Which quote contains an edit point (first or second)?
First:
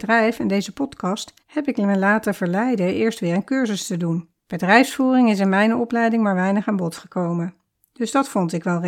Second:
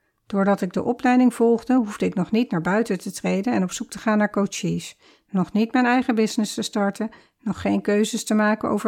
first